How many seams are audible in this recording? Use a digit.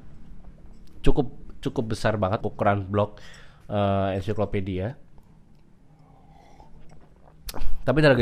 2